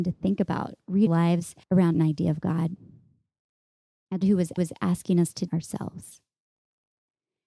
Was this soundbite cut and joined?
yes; 6 cuts; at 1.1 s, 1.6 s, 1.9 s, 4.2 s, 4.6 s, 5.5 s

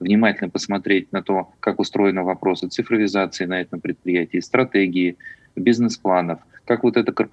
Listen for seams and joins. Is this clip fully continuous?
no; 1 cut; at 1.5 s

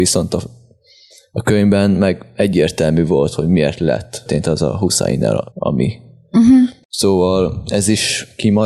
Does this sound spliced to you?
yes; 1 cut; at 5.5 s

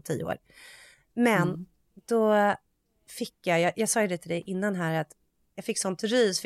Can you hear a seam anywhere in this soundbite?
no; 0 cuts

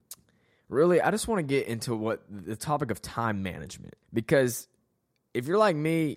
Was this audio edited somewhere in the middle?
yes; 1 cut; at 4.0 s

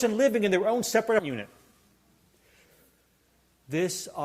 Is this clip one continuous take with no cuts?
no; 1 cut; at 1.2 s

